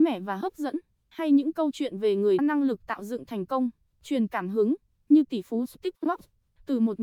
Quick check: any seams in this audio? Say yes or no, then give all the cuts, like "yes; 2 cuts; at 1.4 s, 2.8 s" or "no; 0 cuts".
yes; 1 cut; at 2.4 s